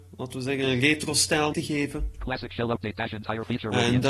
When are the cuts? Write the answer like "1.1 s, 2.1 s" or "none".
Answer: 1.5 s